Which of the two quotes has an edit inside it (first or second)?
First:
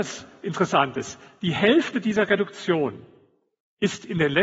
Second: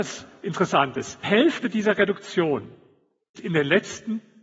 second